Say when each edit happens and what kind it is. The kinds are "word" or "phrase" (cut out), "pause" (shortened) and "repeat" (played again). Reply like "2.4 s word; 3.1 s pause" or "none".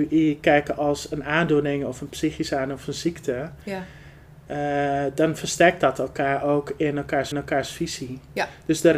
7.3 s repeat